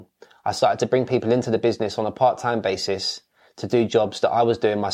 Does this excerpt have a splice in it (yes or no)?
no